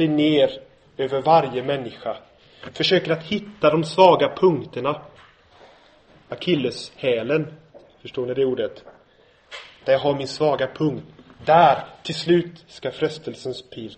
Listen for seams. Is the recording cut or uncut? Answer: uncut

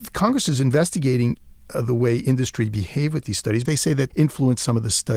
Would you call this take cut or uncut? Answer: cut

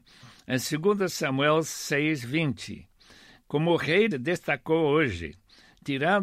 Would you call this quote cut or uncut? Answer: cut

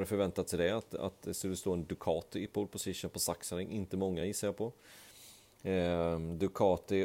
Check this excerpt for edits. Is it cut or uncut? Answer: uncut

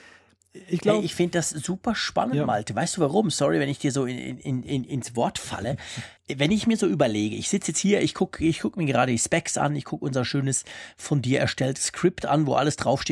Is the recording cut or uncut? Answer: cut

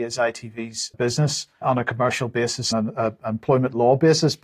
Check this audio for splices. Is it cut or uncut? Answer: cut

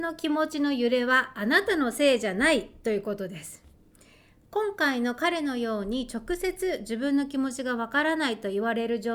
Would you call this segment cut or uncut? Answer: uncut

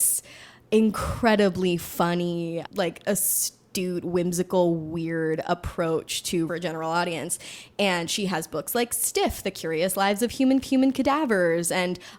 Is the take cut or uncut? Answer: cut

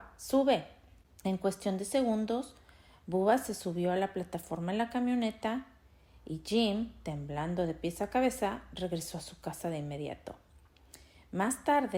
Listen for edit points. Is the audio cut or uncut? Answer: uncut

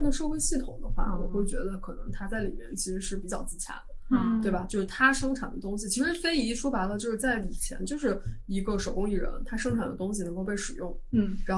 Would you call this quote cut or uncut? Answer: uncut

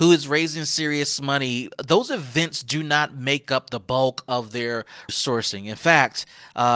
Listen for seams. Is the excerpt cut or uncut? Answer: cut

